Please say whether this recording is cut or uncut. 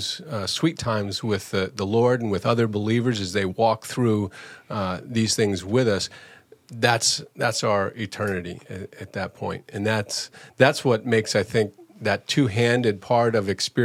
uncut